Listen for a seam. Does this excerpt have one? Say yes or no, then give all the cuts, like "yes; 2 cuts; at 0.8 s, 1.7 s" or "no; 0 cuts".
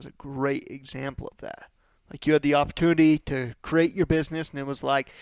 no; 0 cuts